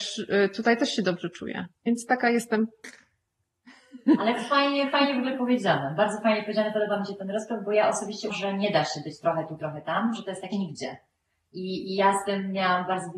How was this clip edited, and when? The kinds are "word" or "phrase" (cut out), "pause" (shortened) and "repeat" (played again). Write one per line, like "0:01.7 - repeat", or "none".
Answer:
0:01.8 - pause
0:08.3 - word
0:10.5 - phrase